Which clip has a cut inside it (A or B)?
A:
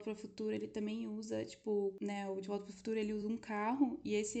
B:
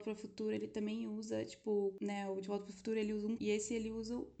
B